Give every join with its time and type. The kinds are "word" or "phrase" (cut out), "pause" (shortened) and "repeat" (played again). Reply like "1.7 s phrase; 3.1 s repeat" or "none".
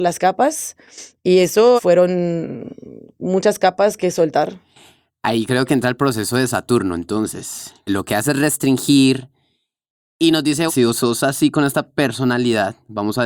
1.8 s word; 4.0 s word; 7.9 s word; 10.7 s word